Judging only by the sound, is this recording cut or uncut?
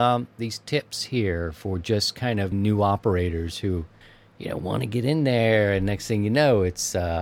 cut